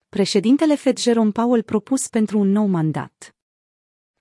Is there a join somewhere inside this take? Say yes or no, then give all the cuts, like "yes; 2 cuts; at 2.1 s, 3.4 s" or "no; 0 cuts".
no; 0 cuts